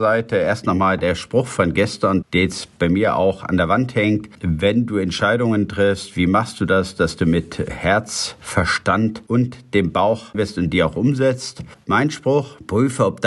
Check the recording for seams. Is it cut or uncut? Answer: cut